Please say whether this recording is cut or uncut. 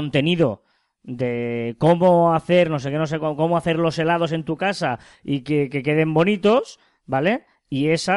uncut